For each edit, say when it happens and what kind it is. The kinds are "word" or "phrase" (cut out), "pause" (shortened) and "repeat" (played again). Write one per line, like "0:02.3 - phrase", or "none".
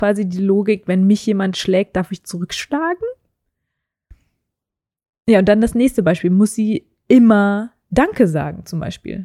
none